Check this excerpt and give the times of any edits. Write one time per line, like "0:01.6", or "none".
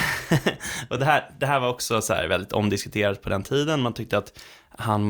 none